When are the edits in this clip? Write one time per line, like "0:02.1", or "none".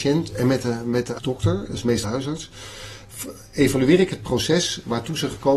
0:01.2
0:02.0